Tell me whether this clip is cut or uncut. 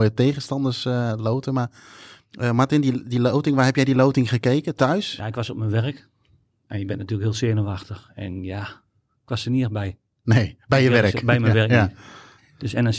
uncut